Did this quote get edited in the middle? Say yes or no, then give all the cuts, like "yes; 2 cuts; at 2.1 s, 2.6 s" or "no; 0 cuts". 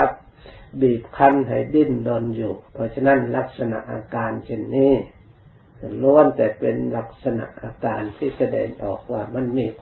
yes; 1 cut; at 2.7 s